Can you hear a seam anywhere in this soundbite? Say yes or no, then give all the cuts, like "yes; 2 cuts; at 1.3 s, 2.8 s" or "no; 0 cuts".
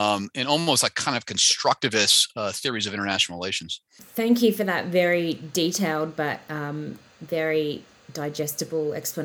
yes; 1 cut; at 3.9 s